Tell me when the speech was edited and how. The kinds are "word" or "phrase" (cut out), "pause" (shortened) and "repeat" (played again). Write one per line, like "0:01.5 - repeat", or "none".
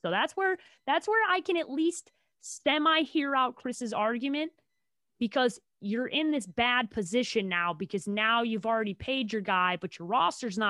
none